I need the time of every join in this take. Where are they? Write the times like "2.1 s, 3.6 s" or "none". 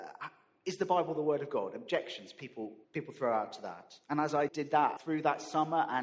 2.8 s, 4.0 s, 4.5 s, 5.0 s